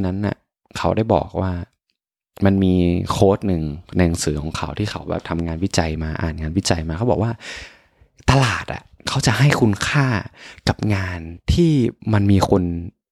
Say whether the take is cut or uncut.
uncut